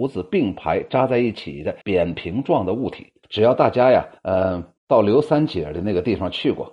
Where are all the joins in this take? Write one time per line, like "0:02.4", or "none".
0:01.8
0:03.2
0:04.2
0:04.8